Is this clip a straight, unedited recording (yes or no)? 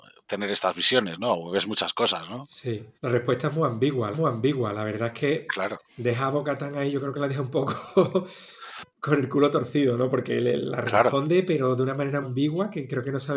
no